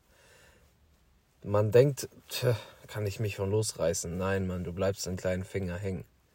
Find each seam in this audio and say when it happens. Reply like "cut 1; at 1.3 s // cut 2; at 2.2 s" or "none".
cut 1; at 5.2 s